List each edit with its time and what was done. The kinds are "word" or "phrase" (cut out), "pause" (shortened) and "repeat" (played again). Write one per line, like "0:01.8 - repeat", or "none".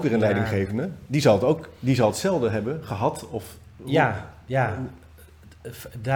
none